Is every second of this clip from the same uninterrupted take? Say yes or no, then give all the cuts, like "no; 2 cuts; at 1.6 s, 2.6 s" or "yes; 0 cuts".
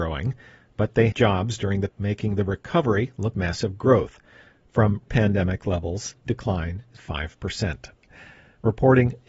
no; 6 cuts; at 1.1 s, 1.9 s, 3.3 s, 5.1 s, 6.3 s, 7.0 s